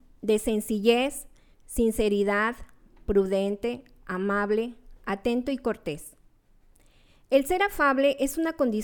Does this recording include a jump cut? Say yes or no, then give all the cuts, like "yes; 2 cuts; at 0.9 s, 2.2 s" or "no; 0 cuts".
no; 0 cuts